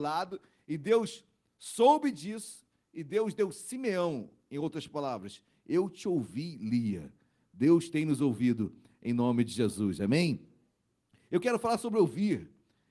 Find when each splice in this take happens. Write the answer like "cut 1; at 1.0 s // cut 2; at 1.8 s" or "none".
none